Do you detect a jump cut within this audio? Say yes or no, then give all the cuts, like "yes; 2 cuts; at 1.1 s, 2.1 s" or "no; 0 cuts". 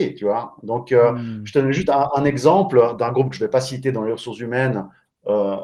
no; 0 cuts